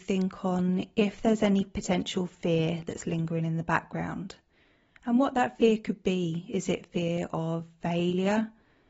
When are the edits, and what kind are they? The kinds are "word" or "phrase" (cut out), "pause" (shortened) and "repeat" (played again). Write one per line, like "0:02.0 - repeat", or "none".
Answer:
none